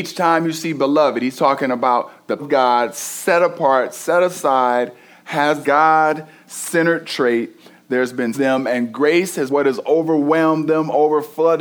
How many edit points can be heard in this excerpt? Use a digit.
4